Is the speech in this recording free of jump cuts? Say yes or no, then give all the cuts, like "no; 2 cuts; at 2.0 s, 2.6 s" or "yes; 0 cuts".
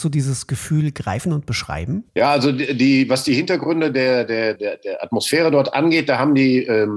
no; 2 cuts; at 2.1 s, 4.6 s